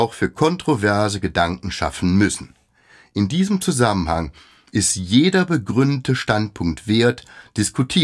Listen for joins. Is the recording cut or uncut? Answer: uncut